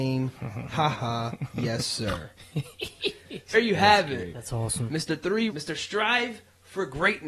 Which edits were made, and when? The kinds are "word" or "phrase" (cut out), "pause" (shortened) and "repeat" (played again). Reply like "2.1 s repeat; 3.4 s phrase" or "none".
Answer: 0.9 s word; 3.5 s word; 5.5 s word